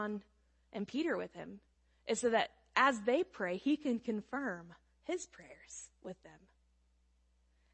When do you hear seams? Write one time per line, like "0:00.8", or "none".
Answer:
none